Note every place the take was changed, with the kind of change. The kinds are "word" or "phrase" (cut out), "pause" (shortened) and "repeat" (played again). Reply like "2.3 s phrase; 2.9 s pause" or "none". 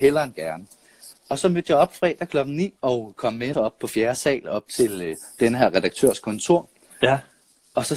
1.2 s pause; 2.8 s pause; 3.5 s word